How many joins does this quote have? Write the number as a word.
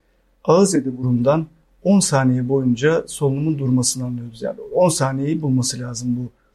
zero